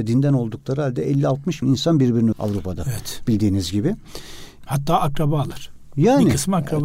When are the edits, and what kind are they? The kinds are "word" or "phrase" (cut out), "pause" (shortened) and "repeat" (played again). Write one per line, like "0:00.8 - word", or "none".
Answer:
0:01.6 - word
0:02.3 - word